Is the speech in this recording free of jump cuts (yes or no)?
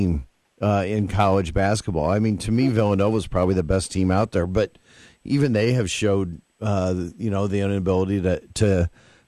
yes